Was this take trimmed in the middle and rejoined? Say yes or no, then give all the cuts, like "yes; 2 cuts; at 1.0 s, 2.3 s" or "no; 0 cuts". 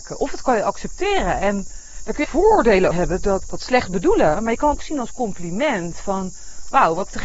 yes; 4 cuts; at 2.2 s, 2.9 s, 3.4 s, 4.8 s